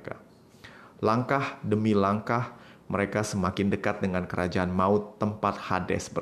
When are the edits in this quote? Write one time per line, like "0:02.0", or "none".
none